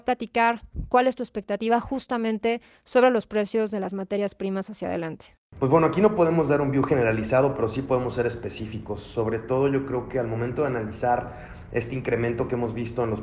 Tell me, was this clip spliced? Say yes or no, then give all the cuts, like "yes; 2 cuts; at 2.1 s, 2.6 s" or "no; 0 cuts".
no; 0 cuts